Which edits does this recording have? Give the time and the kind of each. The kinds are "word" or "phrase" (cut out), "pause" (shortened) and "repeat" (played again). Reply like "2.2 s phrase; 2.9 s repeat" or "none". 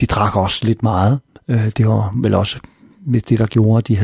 none